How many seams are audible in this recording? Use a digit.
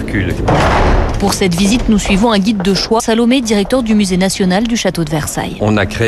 1